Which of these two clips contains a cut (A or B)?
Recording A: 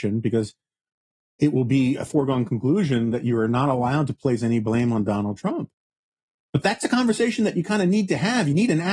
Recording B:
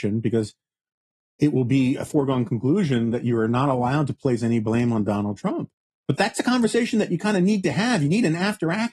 B